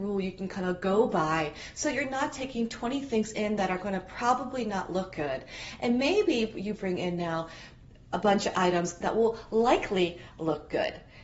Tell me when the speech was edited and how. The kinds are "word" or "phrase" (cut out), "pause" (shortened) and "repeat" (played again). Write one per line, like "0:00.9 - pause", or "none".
none